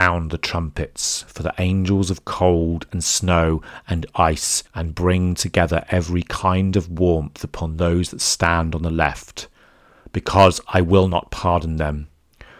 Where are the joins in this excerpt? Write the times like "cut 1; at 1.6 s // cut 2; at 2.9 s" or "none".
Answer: cut 1; at 4.7 s